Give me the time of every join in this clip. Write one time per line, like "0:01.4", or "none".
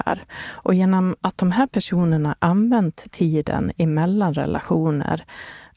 none